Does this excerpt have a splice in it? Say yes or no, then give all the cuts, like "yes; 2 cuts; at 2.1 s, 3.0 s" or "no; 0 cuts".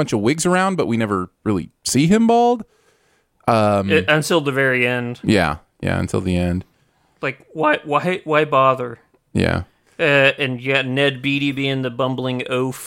no; 0 cuts